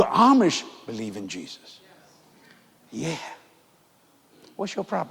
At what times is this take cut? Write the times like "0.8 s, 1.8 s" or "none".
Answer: none